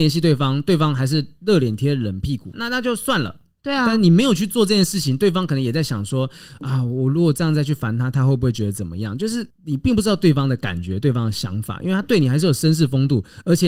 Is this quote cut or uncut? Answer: uncut